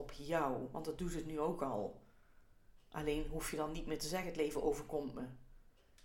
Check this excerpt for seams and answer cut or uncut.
uncut